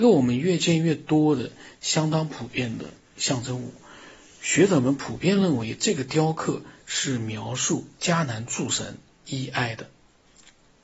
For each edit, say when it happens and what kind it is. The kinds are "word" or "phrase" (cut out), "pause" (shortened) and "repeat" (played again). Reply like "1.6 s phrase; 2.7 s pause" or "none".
none